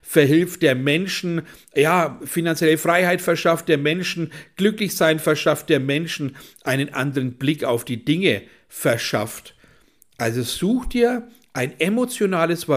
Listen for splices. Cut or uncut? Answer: uncut